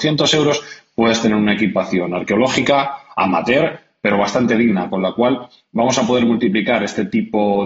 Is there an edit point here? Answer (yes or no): no